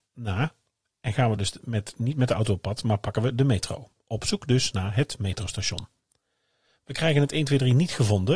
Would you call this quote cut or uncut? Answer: uncut